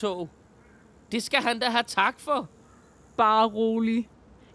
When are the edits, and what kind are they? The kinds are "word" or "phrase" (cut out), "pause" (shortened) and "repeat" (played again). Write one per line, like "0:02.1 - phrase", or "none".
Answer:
none